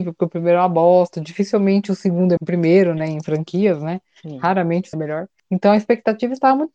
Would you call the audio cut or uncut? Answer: cut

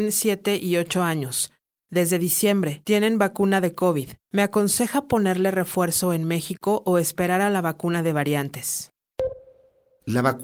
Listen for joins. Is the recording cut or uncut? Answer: uncut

